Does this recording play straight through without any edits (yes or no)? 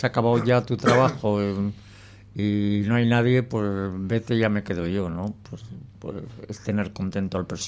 yes